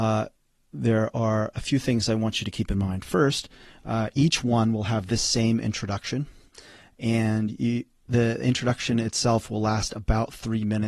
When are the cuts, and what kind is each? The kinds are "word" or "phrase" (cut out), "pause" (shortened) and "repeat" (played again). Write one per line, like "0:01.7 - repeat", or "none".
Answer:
none